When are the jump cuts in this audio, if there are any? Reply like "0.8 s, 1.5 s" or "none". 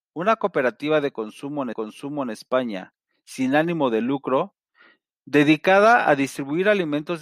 1.7 s